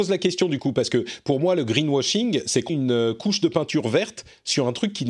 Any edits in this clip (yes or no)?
yes